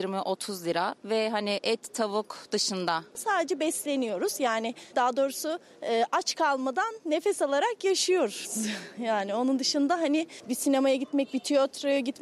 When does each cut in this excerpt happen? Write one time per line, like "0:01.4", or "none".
0:04.9

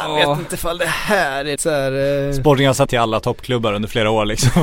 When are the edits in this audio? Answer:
0:01.6
0:02.9

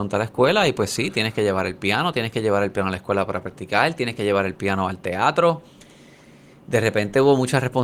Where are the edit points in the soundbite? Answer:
none

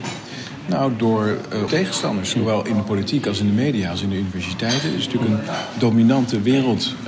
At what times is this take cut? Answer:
0:01.7

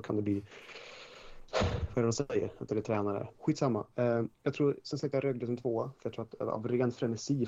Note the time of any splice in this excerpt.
0:02.7
0:04.3

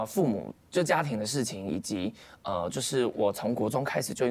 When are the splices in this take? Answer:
none

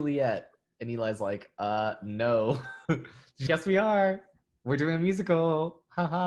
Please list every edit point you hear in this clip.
0:02.8
0:03.5

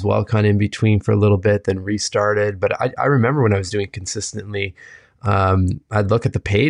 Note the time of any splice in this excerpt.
none

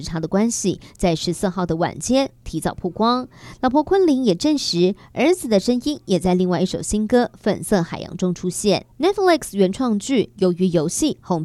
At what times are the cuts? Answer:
0:08.9

